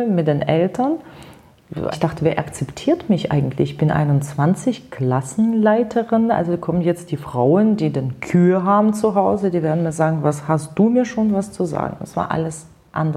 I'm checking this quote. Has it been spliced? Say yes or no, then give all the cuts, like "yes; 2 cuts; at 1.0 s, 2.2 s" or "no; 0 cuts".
yes; 1 cut; at 1.9 s